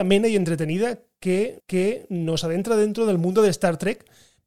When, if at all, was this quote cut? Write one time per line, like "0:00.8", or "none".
0:01.6